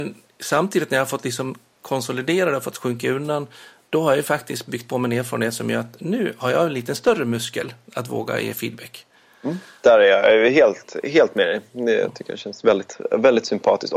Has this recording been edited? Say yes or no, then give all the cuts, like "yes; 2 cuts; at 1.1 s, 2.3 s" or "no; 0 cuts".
no; 0 cuts